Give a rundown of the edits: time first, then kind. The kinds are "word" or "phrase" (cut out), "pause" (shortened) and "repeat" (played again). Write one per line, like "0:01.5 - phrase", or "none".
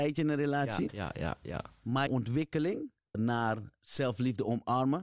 0:02.1 - word
0:03.1 - word